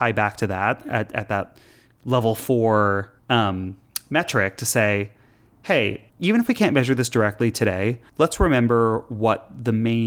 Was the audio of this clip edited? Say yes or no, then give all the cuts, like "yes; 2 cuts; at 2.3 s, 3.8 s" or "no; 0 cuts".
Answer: yes; 3 cuts; at 3.2 s, 6.1 s, 8.1 s